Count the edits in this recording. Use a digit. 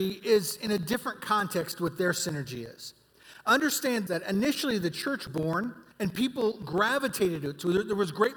3